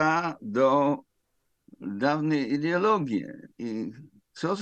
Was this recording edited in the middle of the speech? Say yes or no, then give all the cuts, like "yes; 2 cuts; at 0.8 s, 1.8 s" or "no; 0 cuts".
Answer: no; 0 cuts